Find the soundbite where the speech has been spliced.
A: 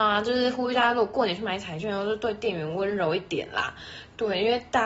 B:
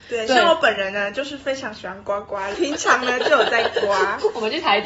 B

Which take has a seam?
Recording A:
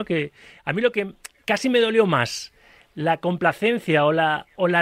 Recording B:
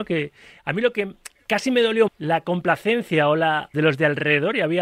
B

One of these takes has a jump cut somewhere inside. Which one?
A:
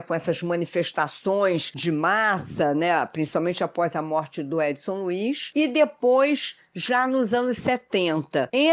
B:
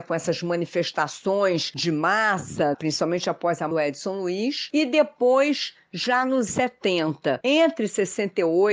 B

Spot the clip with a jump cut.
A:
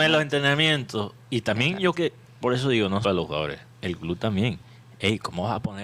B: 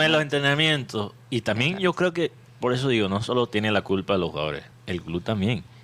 A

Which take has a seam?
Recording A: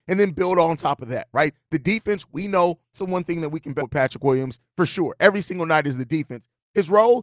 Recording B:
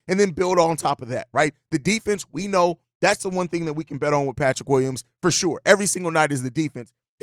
A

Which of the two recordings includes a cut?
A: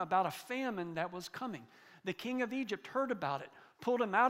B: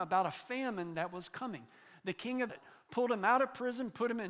B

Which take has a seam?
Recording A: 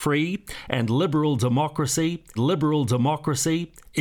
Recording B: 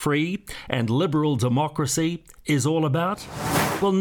A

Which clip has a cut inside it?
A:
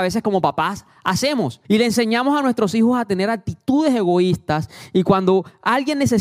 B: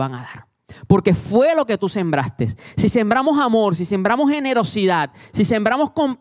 A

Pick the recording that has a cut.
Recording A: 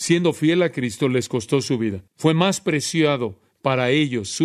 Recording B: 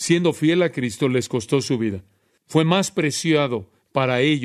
A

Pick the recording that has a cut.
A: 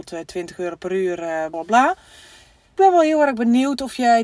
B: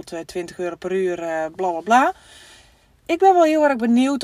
A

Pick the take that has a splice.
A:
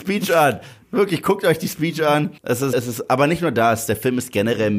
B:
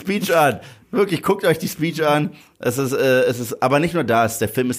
A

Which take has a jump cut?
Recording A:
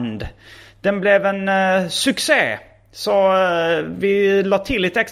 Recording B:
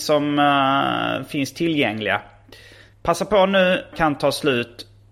B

